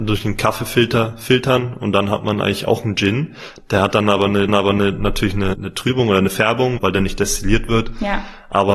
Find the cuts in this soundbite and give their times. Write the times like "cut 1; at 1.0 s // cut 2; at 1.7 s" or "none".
cut 1; at 4.5 s // cut 2; at 5.5 s // cut 3; at 6.8 s